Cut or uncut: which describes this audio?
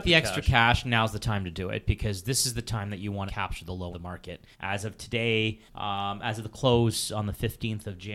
cut